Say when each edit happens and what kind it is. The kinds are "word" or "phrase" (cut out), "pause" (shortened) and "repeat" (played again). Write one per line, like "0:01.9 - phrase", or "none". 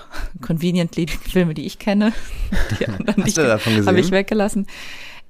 0:01.1 - word
0:03.4 - word